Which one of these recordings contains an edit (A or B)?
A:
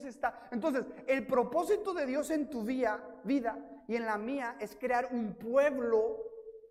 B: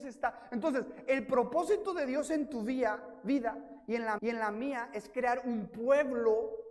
B